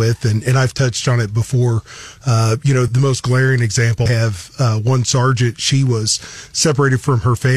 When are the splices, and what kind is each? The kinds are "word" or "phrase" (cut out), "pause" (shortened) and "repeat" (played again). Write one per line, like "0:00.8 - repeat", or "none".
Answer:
0:02.9 - word
0:04.1 - word